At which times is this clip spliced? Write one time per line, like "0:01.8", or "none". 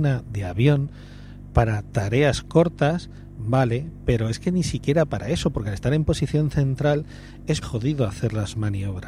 0:07.6